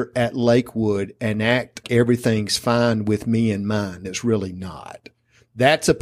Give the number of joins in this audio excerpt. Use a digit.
2